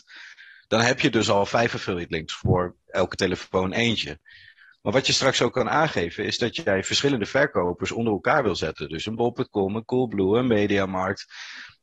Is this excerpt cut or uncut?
uncut